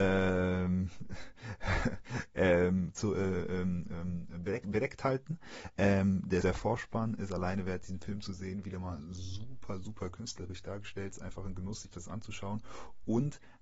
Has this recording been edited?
yes; 1 cut; at 6.4 s

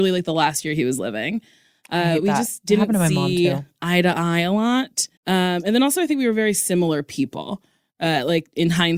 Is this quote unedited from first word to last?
no; 1 cut; at 5.2 s

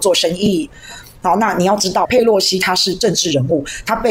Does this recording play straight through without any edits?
no; 1 cut; at 2.0 s

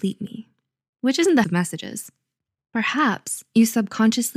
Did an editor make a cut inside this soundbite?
yes; 1 cut; at 1.4 s

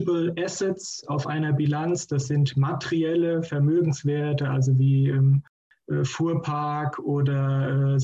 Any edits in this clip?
no; 0 cuts

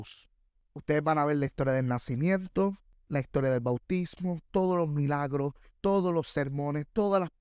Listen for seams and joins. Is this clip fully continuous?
yes; 0 cuts

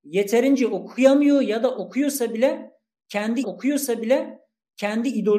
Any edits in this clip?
yes; 1 cut; at 3.4 s

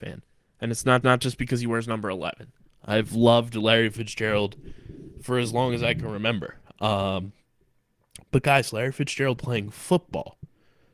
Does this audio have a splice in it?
yes; 2 cuts; at 1.0 s, 9.4 s

